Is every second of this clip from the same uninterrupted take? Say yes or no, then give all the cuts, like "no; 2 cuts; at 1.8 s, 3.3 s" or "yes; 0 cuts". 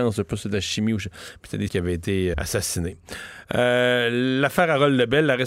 no; 2 cuts; at 1.7 s, 2.3 s